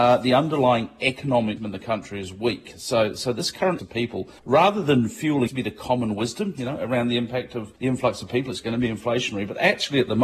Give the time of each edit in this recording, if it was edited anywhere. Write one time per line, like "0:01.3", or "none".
0:01.6
0:03.8
0:04.4
0:05.5
0:07.8